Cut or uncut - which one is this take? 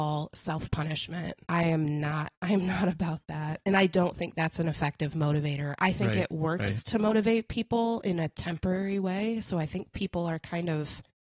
cut